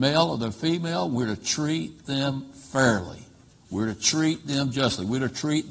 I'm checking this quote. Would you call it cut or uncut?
uncut